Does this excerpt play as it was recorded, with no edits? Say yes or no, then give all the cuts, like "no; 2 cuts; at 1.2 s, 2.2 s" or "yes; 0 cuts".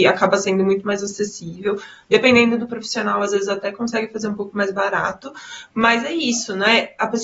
yes; 0 cuts